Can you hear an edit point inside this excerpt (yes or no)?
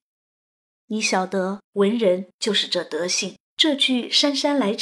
yes